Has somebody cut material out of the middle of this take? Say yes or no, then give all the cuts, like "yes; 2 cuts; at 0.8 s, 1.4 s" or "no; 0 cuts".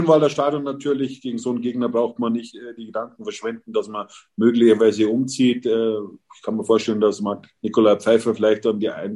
yes; 1 cut; at 7.6 s